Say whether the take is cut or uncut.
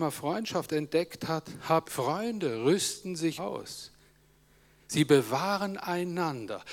cut